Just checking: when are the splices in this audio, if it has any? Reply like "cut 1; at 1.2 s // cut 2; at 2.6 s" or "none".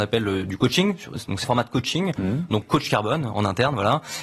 cut 1; at 1.4 s // cut 2; at 2.6 s